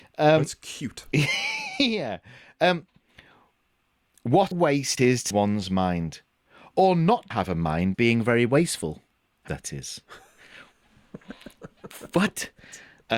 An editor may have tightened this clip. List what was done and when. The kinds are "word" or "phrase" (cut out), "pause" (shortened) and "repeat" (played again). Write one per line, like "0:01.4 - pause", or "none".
0:04.5 - word
0:05.0 - word
0:05.3 - word
0:07.3 - word
0:07.9 - word
0:09.5 - word

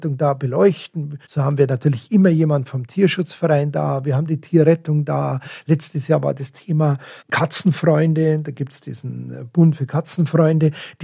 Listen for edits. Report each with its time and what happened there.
0:01.2 - pause
0:07.2 - pause

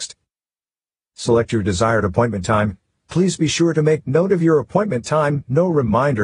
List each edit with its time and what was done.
none

